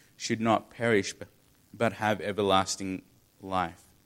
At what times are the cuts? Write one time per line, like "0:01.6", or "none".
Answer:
none